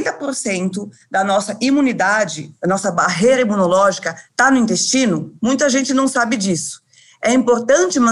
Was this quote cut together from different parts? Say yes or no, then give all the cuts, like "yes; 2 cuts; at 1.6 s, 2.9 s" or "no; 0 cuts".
yes; 2 cuts; at 4.3 s, 5.4 s